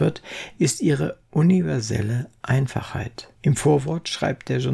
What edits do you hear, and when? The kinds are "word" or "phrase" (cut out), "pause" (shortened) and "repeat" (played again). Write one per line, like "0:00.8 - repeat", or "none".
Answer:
0:03.3 - pause